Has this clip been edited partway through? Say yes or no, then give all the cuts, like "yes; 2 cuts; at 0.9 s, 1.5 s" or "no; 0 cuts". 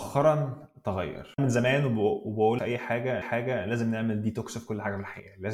yes; 3 cuts; at 1.4 s, 2.6 s, 3.2 s